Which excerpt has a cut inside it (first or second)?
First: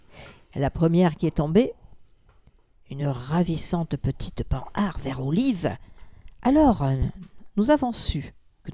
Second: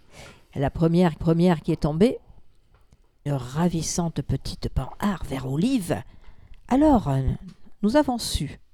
second